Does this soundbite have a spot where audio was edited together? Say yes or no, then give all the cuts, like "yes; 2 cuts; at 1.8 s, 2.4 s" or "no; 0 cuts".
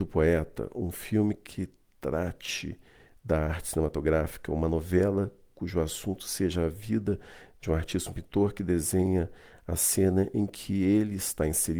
no; 0 cuts